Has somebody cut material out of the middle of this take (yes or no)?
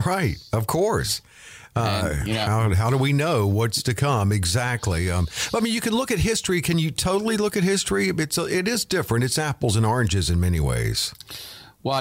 no